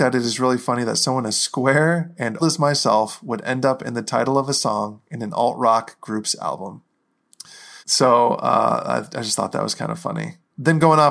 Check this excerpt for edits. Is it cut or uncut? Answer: cut